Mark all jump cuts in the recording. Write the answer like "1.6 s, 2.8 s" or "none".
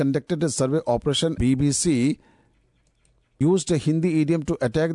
1.4 s, 3.4 s